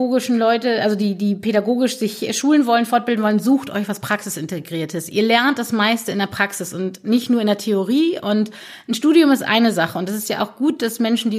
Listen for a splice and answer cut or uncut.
uncut